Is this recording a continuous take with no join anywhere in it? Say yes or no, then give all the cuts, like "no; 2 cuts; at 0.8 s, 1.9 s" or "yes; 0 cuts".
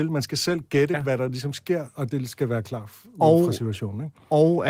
yes; 0 cuts